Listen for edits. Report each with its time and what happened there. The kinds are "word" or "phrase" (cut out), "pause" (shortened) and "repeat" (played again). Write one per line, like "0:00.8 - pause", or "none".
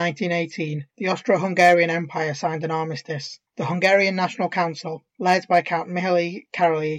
0:00.9 - pause
0:03.5 - pause
0:05.1 - pause